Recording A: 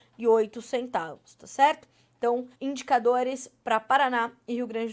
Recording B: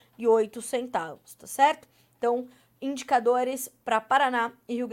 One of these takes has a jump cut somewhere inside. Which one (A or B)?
A